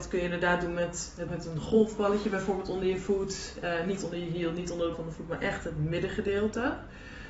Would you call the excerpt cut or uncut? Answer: cut